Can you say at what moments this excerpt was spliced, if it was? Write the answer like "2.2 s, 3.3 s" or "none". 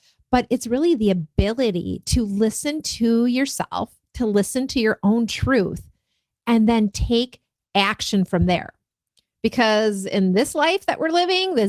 none